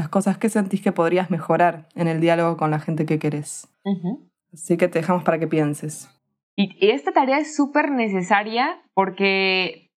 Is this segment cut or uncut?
cut